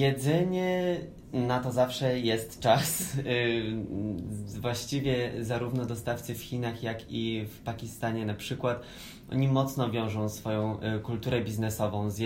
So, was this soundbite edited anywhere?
no; 0 cuts

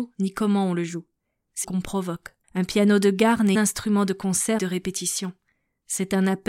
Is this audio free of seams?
no; 4 cuts; at 1.6 s, 2.4 s, 3.5 s, 4.6 s

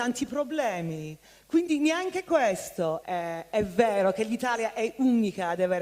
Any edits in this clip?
yes; 1 cut; at 3.0 s

